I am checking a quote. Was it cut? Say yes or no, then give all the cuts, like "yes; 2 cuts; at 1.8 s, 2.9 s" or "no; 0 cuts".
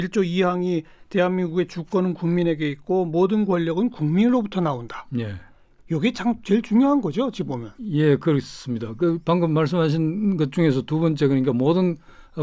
no; 0 cuts